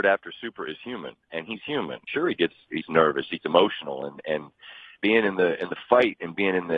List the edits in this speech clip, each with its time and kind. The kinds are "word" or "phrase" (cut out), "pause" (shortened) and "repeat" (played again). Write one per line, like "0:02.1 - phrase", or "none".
0:02.1 - word
0:02.8 - word
0:03.4 - word
0:05.0 - word